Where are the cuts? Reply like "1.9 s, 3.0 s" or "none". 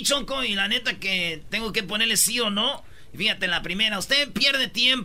none

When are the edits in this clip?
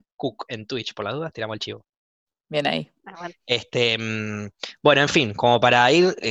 3.0 s

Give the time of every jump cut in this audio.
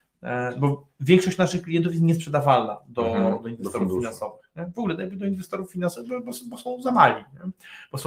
none

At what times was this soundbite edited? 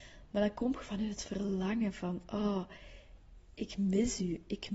none

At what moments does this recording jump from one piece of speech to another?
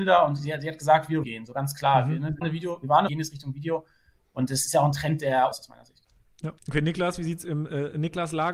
1.2 s, 2.4 s, 3.1 s, 5.5 s, 6.6 s

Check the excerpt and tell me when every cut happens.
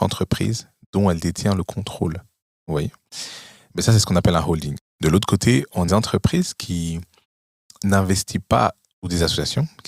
5.9 s

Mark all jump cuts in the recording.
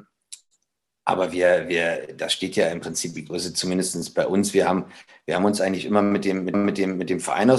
3.3 s, 6.5 s

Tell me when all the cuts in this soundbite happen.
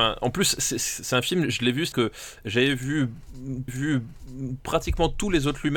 1.9 s, 3.7 s

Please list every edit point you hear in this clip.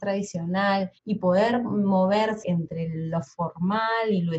1.0 s, 2.4 s

